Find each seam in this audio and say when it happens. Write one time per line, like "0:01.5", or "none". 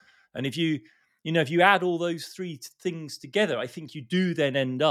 none

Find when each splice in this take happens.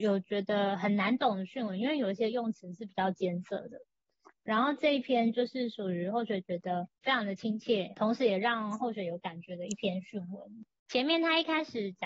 0:07.9

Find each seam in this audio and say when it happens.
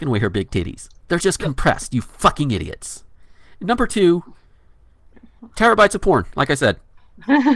0:01.0

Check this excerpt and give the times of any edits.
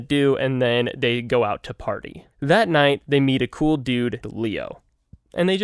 0:02.3
0:04.2

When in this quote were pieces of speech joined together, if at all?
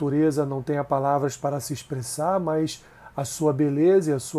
none

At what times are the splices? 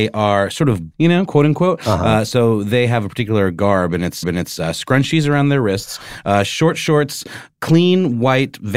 0:00.9
0:04.2

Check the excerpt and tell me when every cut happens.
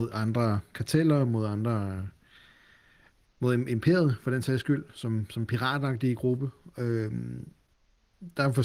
none

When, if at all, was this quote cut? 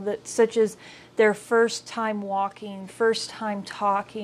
0:02.9

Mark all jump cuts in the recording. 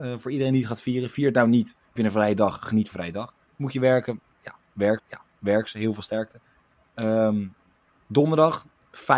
0:02.0
0:02.9
0:05.0

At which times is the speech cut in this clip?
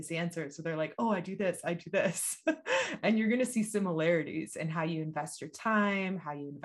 none

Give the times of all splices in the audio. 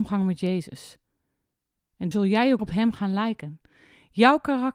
0:02.1
0:02.6

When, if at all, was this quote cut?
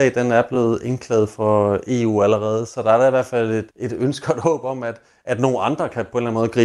0:03.7

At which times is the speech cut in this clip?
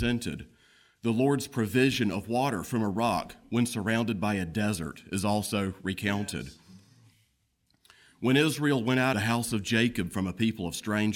0:09.1

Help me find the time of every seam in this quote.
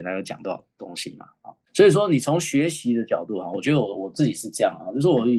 0:01.6

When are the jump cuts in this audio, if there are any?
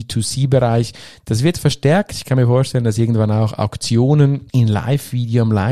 0:04.5

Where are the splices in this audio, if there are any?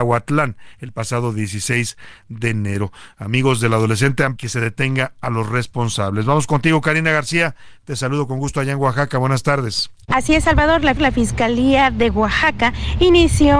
0:04.4
0:10.0
0:11.0

